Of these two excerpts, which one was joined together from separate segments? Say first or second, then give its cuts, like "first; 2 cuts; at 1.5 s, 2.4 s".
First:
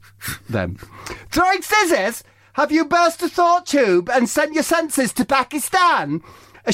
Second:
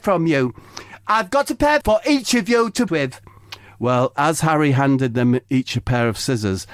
second; 2 cuts; at 1.8 s, 2.9 s